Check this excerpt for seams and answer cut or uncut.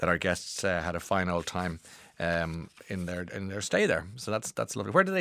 uncut